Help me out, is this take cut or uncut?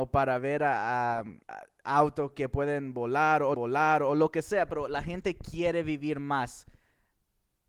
cut